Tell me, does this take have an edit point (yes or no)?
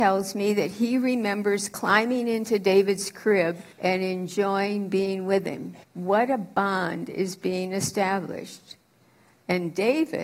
yes